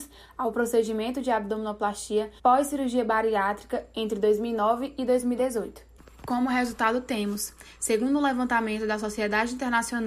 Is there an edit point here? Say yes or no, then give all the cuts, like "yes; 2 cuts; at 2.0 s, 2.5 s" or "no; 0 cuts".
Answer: yes; 1 cut; at 2.4 s